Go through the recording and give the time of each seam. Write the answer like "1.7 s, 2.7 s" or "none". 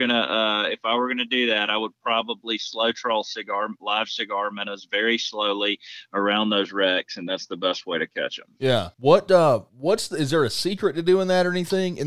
8.9 s, 9.7 s

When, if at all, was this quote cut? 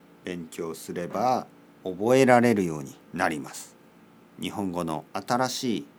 1.7 s, 3.0 s, 3.9 s, 5.1 s

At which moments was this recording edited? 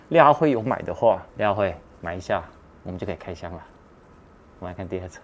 1.3 s

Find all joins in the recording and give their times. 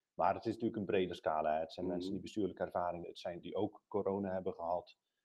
3.0 s, 3.4 s

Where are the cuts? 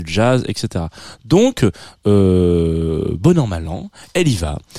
none

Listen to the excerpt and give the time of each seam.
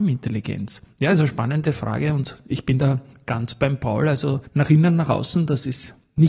4.4 s

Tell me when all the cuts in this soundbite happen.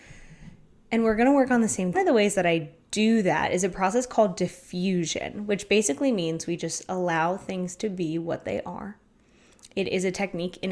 1.9 s

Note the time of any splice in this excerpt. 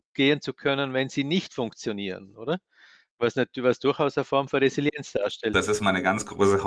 none

